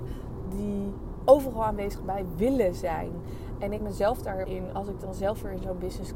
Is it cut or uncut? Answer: cut